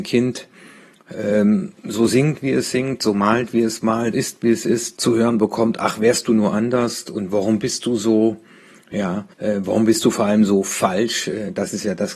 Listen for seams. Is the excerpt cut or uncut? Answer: cut